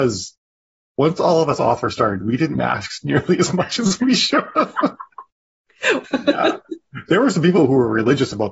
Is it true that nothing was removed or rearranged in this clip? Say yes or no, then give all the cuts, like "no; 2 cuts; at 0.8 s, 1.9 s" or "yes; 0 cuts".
no; 3 cuts; at 2.2 s, 2.6 s, 6.0 s